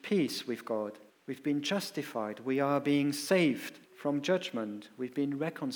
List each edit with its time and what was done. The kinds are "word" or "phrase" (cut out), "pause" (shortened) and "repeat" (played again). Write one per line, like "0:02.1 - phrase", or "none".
0:01.1 - pause
0:03.9 - pause